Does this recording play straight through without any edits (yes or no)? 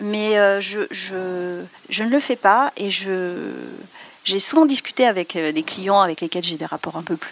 no